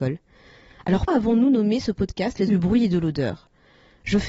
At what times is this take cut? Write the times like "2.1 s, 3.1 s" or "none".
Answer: 1.1 s, 2.5 s